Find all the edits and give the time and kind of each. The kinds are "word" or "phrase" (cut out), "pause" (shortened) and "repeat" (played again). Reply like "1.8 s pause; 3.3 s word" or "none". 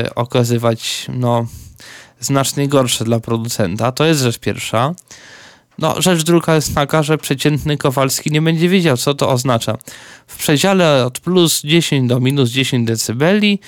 none